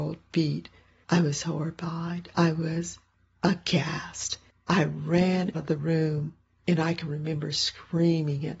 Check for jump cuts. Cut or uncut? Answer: cut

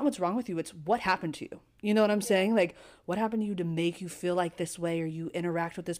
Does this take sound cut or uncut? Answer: uncut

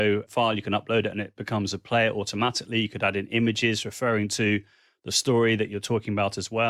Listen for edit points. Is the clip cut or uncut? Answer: uncut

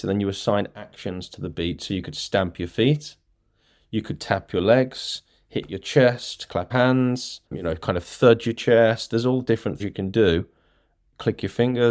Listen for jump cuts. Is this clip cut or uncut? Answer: cut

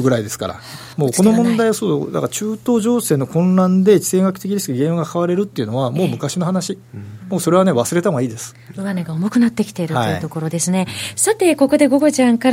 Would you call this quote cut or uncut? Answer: cut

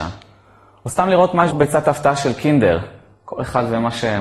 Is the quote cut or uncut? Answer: cut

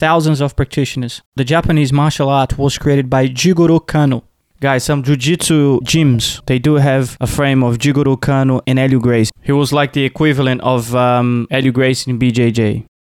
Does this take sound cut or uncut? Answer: cut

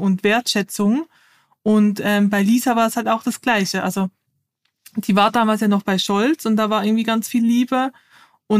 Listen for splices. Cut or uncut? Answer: uncut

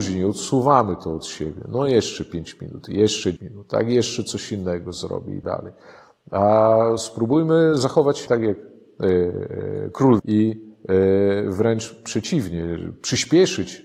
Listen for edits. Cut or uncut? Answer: cut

